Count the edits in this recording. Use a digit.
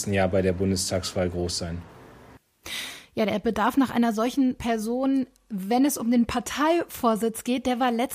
0